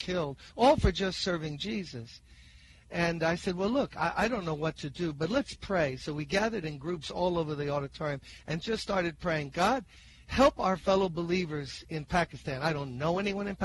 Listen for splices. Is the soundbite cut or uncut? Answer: uncut